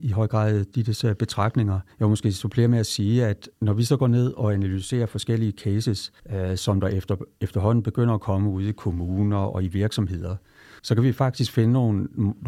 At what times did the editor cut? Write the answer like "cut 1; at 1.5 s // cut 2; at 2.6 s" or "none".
cut 1; at 1.9 s // cut 2; at 3.5 s // cut 3; at 6.2 s // cut 4; at 10.8 s